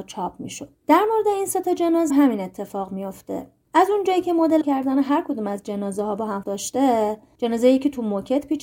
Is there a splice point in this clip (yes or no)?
yes